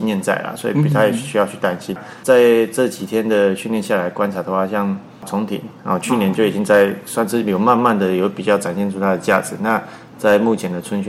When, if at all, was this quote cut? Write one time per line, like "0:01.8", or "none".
0:05.1

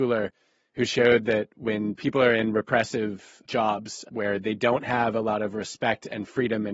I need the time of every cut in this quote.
none

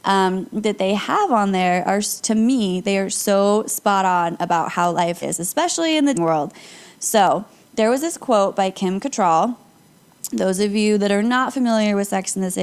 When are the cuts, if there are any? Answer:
0:05.2
0:06.1

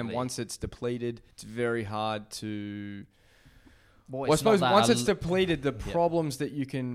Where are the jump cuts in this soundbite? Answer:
0:01.3

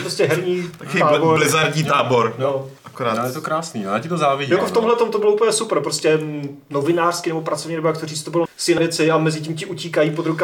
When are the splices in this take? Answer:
0:02.8
0:04.6
0:08.5
0:08.8

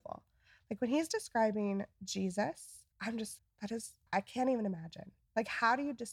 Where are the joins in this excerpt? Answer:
0:02.9
0:03.4
0:04.1

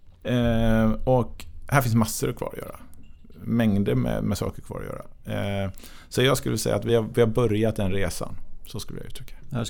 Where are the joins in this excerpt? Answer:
none

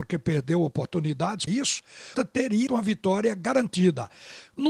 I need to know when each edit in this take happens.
0:01.5
0:02.1
0:02.7

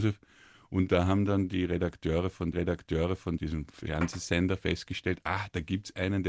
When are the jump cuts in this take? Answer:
0:02.5

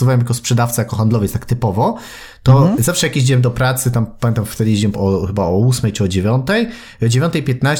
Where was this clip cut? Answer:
0:04.9

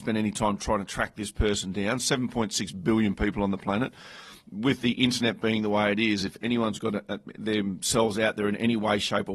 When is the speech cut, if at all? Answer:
none

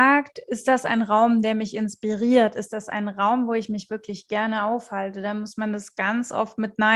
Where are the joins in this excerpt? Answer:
none

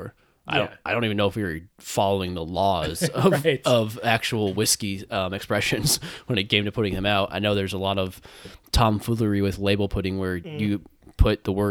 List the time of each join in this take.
0:01.7

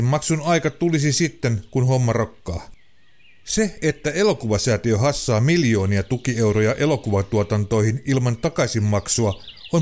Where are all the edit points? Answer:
none

